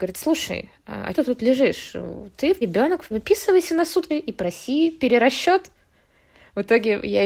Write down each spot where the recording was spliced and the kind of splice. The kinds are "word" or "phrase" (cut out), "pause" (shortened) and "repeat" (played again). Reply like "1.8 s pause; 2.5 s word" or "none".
1.1 s word; 2.6 s word; 3.1 s word; 4.1 s word